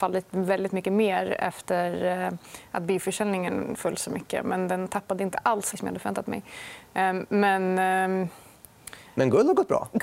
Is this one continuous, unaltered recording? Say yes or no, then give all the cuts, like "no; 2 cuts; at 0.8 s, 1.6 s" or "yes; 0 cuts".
no; 1 cut; at 5.7 s